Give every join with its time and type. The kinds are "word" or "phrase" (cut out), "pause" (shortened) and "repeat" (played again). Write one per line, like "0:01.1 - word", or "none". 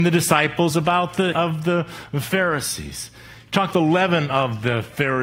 0:01.3 - word
0:03.7 - word